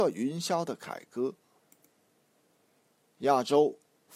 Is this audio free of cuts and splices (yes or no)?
yes